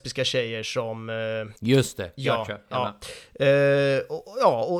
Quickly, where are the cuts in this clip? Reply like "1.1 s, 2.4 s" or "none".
1.6 s, 2.7 s